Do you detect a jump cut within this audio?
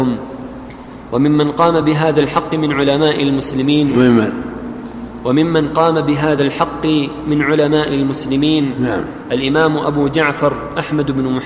no; 0 cuts

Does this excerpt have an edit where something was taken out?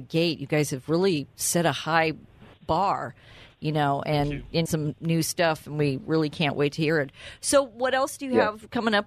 yes; 2 cuts; at 2.5 s, 4.7 s

